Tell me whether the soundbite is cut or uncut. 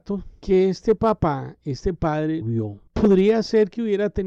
cut